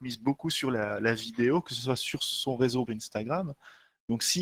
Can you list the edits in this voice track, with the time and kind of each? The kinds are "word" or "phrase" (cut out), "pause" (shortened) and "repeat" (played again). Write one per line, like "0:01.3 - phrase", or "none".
0:02.9 - phrase